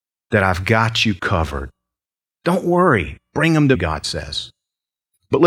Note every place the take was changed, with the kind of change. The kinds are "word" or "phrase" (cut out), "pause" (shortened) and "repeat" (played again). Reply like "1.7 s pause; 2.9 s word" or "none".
3.7 s word